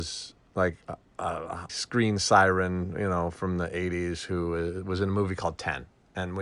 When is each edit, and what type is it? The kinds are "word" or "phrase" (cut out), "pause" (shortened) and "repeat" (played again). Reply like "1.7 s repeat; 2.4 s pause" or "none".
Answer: 1.7 s word